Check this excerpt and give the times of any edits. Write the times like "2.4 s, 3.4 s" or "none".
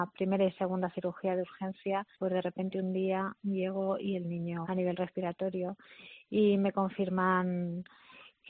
2.1 s, 4.6 s